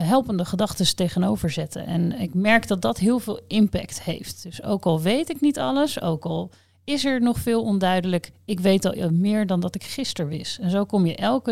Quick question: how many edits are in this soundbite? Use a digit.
0